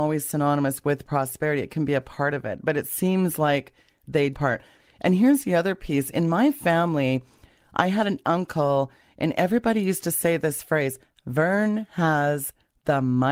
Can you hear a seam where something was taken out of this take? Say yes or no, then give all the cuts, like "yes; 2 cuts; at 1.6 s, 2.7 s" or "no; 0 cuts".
yes; 1 cut; at 4.3 s